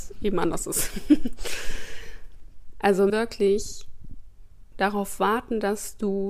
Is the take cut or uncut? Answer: cut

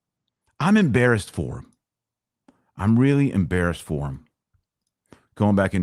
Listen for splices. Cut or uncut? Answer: uncut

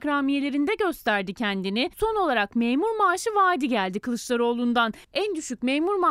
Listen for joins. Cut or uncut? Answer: cut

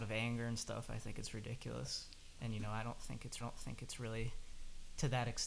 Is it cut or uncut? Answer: cut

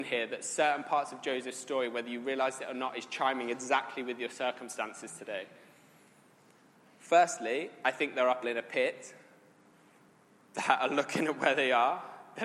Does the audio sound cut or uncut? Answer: cut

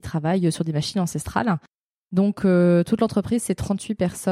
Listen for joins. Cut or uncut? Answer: uncut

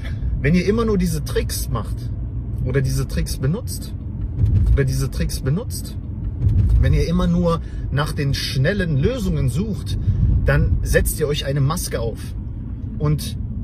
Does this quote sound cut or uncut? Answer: cut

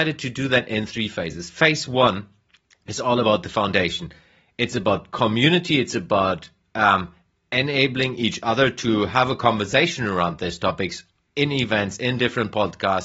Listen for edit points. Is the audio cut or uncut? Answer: uncut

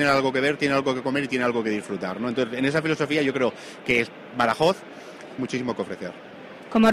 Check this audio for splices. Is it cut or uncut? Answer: cut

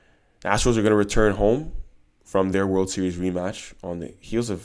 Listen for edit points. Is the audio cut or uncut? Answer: uncut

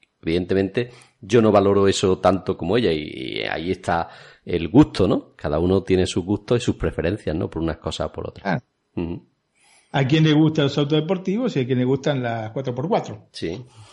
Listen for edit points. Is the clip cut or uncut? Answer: uncut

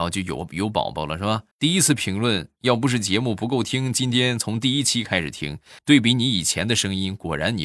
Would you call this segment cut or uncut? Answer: cut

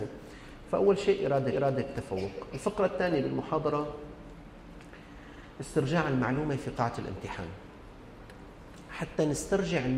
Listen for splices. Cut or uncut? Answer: cut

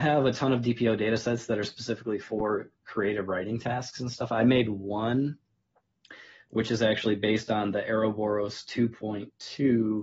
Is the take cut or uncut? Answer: uncut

